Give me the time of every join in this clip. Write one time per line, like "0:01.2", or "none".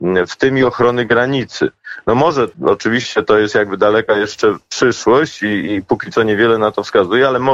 0:02.5

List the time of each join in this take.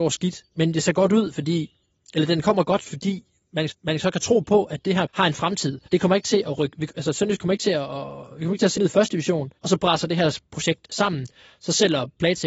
0:03.7
0:05.1
0:05.8
0:06.9
0:08.7
0:09.6

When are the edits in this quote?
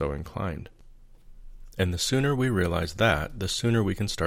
none

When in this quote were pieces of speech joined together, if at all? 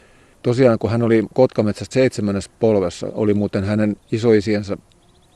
0:01.9
0:04.0

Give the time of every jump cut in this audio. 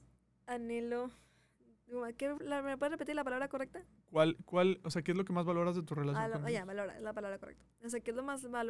0:02.4

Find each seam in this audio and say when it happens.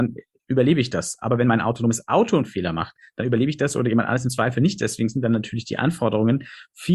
none

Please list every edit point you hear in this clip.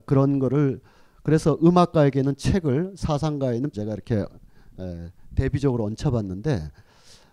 0:03.7

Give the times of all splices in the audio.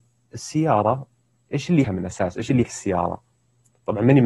0:01.8
0:02.6

